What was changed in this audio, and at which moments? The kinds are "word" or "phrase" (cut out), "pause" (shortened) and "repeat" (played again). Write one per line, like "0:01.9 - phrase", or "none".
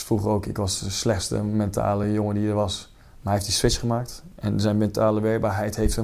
none